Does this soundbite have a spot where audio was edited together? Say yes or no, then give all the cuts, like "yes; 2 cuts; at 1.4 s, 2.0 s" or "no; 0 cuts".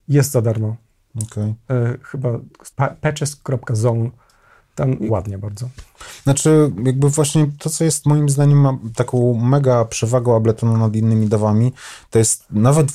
yes; 2 cuts; at 2.7 s, 5.1 s